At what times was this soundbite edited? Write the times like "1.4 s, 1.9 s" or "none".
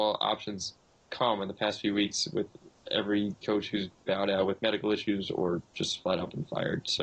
none